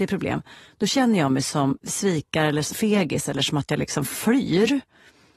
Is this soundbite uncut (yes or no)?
no